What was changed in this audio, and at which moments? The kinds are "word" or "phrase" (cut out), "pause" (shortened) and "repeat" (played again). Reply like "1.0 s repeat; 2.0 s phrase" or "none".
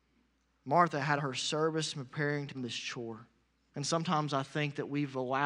1.2 s word; 2.5 s word; 3.4 s pause